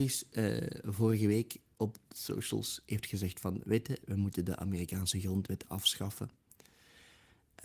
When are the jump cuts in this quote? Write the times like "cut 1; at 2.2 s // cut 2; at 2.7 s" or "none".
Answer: none